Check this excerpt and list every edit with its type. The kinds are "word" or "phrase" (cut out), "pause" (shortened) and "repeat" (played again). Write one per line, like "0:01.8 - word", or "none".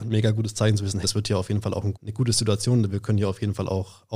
0:01.0 - word
0:01.9 - word